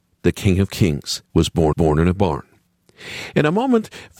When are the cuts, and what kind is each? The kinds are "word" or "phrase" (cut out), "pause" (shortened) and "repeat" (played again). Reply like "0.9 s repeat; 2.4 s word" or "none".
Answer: 1.2 s pause; 1.7 s repeat

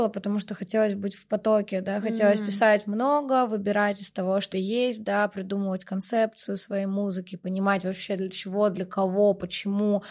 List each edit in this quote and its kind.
4.5 s phrase

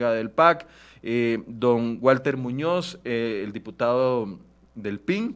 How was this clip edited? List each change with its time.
none

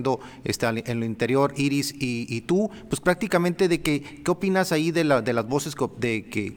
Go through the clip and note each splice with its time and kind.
none

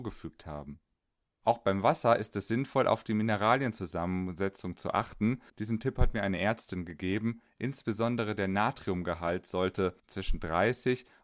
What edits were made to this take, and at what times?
5.5 s pause; 10.0 s pause

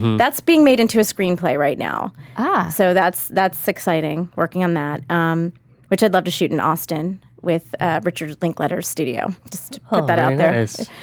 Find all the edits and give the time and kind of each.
none

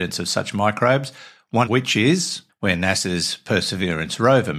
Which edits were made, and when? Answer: 1.7 s word; 2.5 s phrase

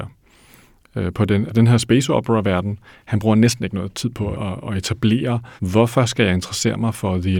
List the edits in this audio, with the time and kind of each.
1.5 s word; 4.3 s phrase; 5.6 s pause

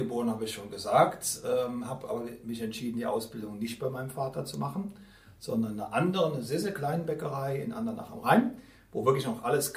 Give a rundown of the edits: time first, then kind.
none

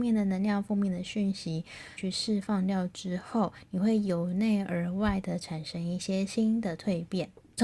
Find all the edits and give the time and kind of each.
2.0 s word

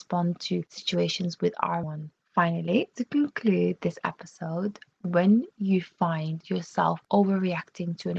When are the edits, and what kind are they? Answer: 1.8 s word; 2.9 s word

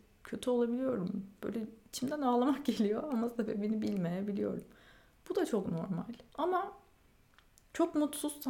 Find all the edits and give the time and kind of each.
6.3 s pause

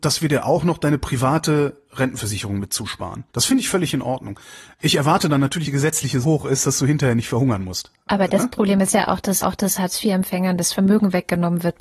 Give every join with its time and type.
3.3 s pause; 5.6 s phrase; 6.2 s word; 9.4 s repeat

